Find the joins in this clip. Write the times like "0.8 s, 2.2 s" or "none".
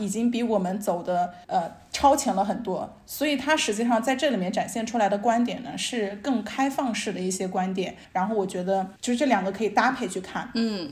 1.4 s, 8.0 s, 9.0 s

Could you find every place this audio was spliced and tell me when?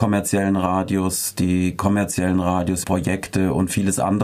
2.8 s

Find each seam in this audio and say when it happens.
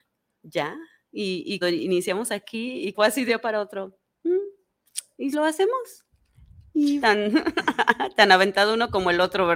1.6 s, 2.9 s, 3.3 s, 5.3 s, 7.0 s

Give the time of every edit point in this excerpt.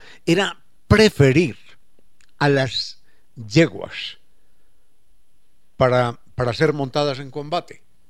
none

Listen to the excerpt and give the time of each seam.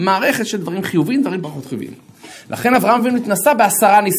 none

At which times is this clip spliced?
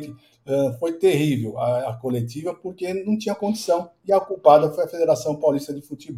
none

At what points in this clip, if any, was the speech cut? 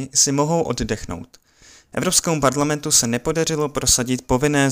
none

